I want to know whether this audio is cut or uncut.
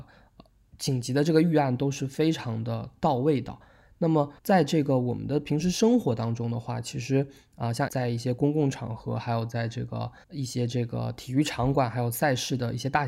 cut